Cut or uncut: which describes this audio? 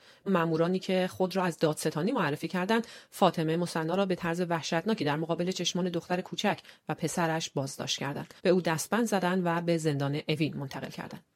cut